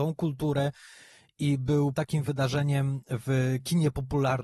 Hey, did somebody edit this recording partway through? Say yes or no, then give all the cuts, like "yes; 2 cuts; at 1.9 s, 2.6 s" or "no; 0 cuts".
yes; 1 cut; at 1.9 s